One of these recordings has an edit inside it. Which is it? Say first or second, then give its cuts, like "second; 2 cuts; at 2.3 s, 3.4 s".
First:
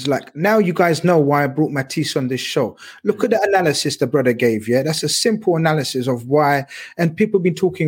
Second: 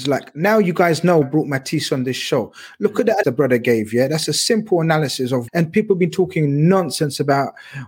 second; 3 cuts; at 1.2 s, 3.2 s, 5.5 s